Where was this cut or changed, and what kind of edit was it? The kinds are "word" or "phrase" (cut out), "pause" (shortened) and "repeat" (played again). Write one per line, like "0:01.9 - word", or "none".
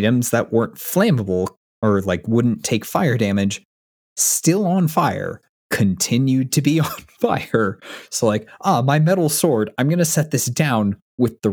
none